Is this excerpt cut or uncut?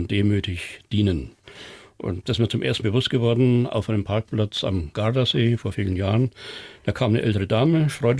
cut